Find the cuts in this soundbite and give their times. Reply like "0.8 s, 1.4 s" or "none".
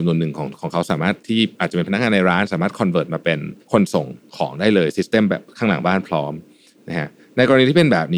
3.6 s